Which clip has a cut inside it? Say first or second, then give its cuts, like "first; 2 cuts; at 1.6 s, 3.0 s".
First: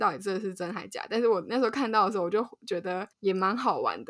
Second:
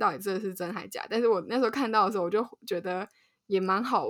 first; 1 cut; at 3.1 s